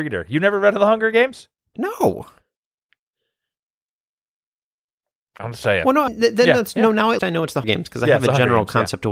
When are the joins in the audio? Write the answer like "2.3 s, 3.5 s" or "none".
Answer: 6.1 s, 7.2 s, 7.6 s